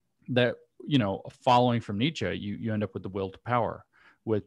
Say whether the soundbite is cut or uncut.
uncut